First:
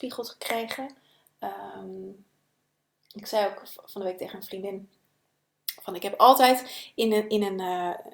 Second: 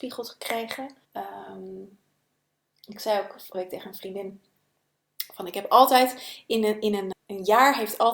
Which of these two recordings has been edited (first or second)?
second